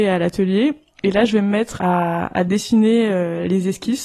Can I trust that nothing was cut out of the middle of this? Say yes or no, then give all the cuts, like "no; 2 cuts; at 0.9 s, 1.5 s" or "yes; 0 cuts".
no; 1 cut; at 1.8 s